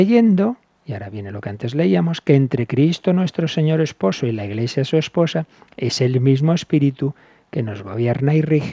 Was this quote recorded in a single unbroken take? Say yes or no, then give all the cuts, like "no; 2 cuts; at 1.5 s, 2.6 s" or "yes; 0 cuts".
yes; 0 cuts